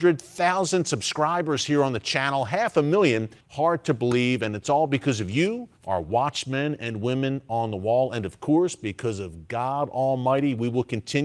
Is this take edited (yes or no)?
yes